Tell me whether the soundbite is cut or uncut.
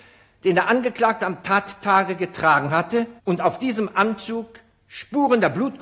cut